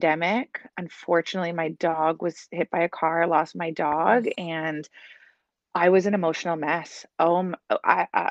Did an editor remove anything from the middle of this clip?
no; 0 cuts

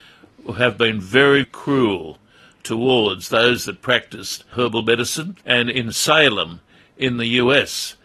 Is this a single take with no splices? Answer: no; 3 cuts; at 1.4 s, 4.5 s, 5.4 s

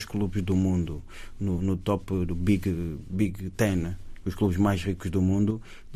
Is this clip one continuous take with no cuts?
yes; 0 cuts

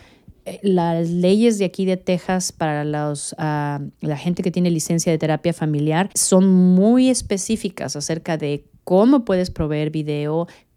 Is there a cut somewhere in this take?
yes; 1 cut; at 6.1 s

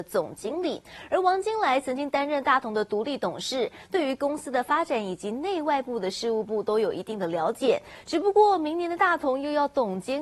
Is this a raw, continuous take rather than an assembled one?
yes; 0 cuts

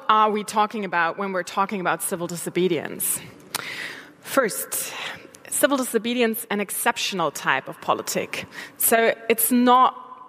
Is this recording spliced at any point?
yes; 1 cut; at 6.5 s

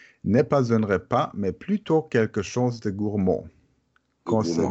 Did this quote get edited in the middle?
no; 0 cuts

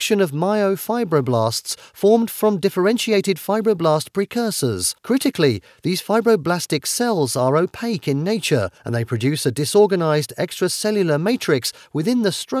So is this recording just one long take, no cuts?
no; 2 cuts; at 5.0 s, 8.8 s

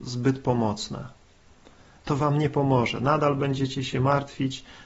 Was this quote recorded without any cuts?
no; 1 cut; at 2.2 s

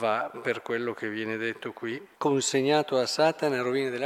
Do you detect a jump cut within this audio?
yes; 1 cut; at 2.1 s

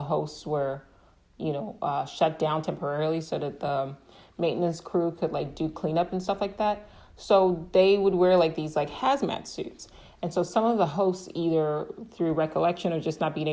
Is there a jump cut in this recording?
no; 0 cuts

